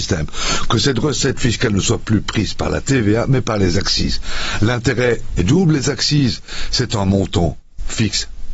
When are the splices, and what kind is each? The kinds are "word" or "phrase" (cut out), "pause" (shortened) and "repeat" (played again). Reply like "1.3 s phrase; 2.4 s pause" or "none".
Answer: none